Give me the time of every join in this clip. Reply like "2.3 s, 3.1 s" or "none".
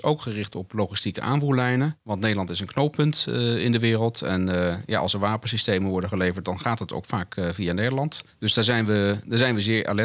none